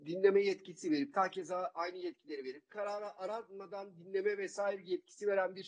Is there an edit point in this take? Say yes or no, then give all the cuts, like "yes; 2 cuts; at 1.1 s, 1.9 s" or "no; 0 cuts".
yes; 2 cuts; at 1.1 s, 2.7 s